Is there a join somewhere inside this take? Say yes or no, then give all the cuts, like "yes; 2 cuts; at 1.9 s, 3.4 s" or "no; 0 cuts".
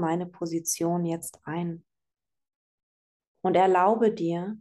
no; 0 cuts